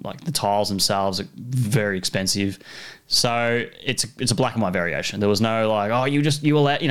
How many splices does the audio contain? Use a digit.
0